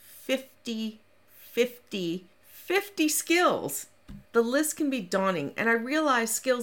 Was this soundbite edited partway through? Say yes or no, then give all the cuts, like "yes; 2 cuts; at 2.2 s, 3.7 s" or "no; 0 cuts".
yes; 2 cuts; at 2.3 s, 4.2 s